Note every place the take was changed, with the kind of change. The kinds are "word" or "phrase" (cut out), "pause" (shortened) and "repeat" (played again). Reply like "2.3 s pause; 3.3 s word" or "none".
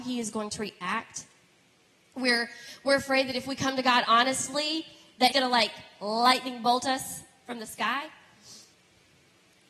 5.3 s word

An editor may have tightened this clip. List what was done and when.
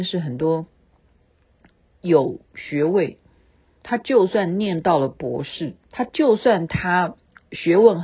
5.8 s pause

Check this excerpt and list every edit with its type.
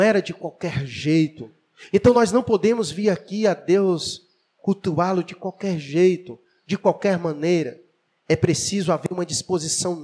none

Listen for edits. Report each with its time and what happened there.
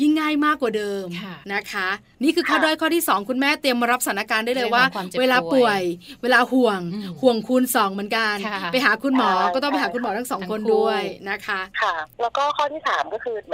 1.4 s pause; 12.1 s pause

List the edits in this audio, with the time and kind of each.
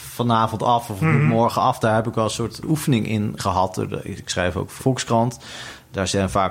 2.6 s word; 3.4 s word; 4.2 s word; 4.8 s word

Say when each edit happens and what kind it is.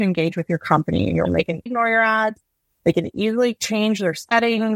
1.2 s word; 1.7 s word

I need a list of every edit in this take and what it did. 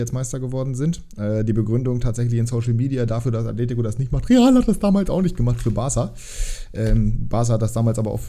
none

